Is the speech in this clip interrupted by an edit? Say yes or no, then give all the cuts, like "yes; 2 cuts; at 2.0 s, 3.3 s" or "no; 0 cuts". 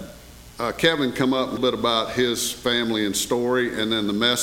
yes; 1 cut; at 1.6 s